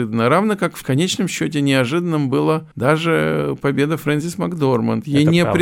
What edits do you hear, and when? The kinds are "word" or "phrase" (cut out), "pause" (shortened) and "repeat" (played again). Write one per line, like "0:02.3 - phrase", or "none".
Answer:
0:02.7 - pause